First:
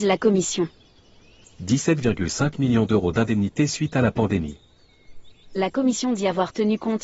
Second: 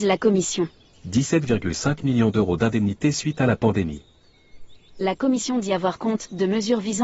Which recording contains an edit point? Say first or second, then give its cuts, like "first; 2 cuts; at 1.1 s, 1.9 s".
second; 2 cuts; at 0.9 s, 6.0 s